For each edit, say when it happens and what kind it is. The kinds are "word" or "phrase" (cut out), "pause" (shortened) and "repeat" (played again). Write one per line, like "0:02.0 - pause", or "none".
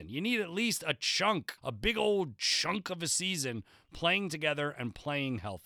0:01.6 - pause